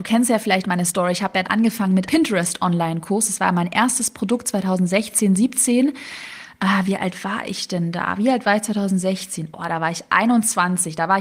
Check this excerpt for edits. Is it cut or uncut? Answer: cut